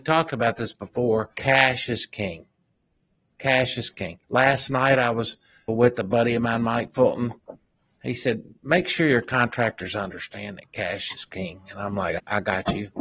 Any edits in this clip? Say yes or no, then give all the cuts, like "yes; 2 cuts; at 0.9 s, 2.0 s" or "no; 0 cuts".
yes; 2 cuts; at 1.3 s, 4.2 s